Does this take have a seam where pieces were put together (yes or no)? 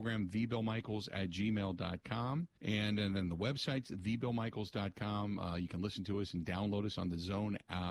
yes